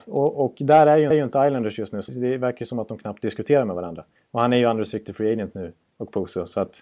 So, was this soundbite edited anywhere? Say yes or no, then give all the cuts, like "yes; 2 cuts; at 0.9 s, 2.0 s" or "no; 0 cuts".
yes; 3 cuts; at 1.1 s, 2.1 s, 4.2 s